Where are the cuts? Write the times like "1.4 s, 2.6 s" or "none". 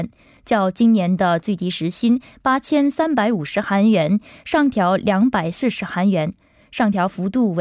none